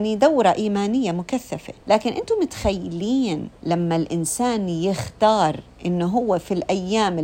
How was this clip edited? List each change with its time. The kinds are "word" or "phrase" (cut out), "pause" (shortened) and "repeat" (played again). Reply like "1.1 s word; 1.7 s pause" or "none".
1.8 s pause; 3.6 s pause

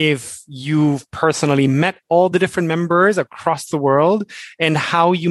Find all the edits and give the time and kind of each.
none

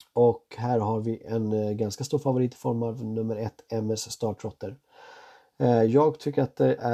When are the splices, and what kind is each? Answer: none

